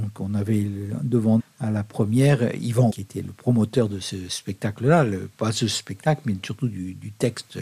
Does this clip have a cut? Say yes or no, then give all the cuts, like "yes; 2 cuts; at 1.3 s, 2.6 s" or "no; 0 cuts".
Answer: yes; 2 cuts; at 1.4 s, 2.9 s